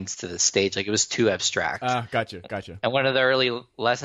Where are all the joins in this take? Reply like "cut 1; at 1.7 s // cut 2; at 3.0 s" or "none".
none

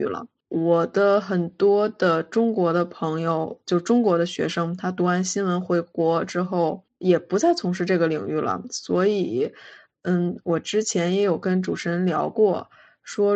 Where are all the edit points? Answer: none

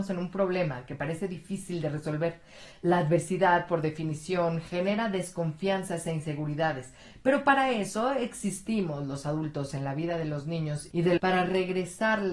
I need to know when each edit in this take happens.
cut 1; at 11.2 s

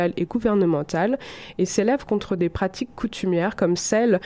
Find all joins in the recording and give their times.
none

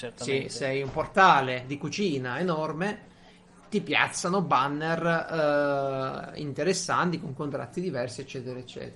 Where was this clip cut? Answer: none

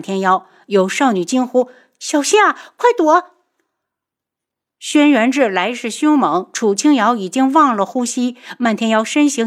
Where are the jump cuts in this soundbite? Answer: none

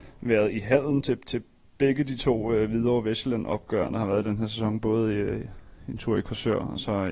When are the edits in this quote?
none

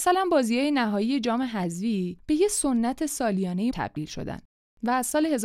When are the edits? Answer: cut 1; at 3.7 s

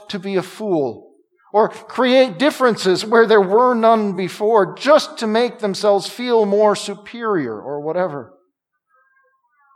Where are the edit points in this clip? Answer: none

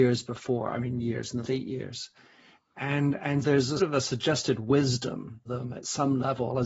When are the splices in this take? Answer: cut 1; at 1.4 s // cut 2; at 3.4 s // cut 3; at 3.8 s // cut 4; at 5.5 s

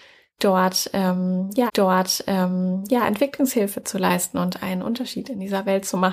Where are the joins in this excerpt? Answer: cut 1; at 1.7 s

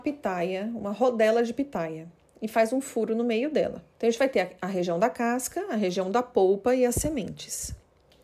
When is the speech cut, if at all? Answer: cut 1; at 3.9 s

